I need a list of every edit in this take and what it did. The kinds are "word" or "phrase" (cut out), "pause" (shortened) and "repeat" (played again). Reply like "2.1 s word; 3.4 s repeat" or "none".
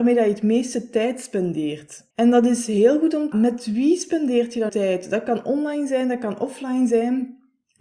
2.1 s pause; 3.3 s phrase; 4.7 s word